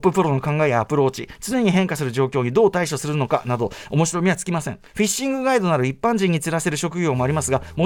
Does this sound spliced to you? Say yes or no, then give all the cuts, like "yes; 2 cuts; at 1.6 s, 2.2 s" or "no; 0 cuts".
yes; 1 cut; at 4.9 s